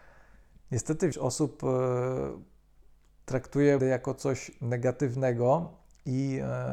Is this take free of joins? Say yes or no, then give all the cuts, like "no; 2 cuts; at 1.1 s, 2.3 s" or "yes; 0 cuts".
no; 2 cuts; at 1.1 s, 3.8 s